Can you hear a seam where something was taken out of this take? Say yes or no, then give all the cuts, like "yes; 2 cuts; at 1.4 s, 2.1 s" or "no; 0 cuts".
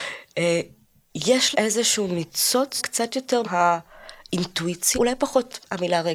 yes; 4 cuts; at 1.5 s, 2.8 s, 3.4 s, 4.9 s